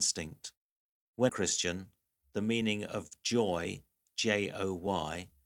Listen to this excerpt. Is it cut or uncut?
cut